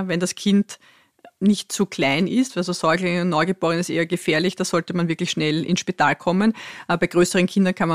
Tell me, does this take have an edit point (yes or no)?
no